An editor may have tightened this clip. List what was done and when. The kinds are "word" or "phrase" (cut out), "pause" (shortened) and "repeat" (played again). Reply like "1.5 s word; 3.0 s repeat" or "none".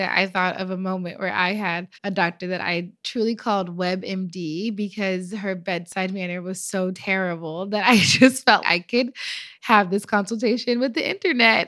1.9 s pause; 8.6 s word